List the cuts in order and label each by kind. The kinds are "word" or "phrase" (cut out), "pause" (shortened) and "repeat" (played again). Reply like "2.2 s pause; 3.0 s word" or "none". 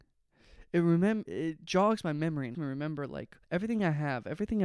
1.3 s word; 2.5 s word; 3.4 s pause